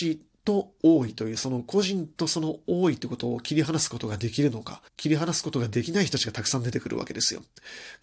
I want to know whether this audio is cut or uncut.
cut